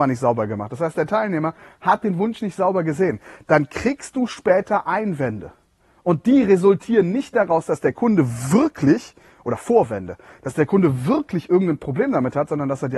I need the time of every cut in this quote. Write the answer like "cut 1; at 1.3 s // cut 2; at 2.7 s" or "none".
none